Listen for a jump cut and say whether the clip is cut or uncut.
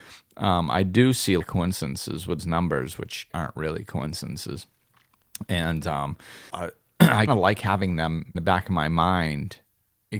cut